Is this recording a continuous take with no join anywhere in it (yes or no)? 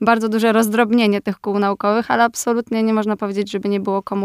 yes